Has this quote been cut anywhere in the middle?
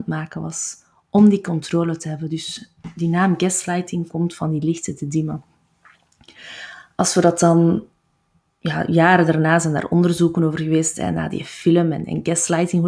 no; 0 cuts

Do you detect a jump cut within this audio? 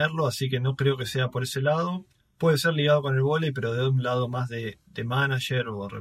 no; 0 cuts

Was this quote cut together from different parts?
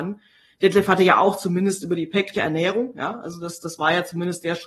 yes; 1 cut; at 2.3 s

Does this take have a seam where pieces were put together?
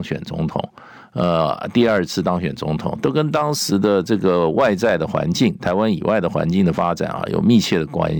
no; 0 cuts

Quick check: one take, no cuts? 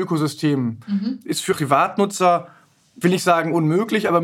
no; 2 cuts; at 1.5 s, 3.0 s

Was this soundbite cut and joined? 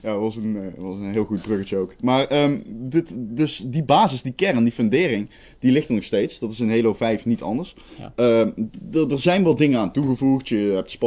no; 0 cuts

